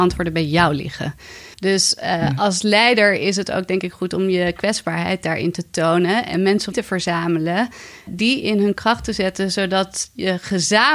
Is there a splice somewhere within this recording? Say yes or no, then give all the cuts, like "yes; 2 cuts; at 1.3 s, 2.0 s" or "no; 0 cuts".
yes; 3 cuts; at 1.5 s, 6.7 s, 8.1 s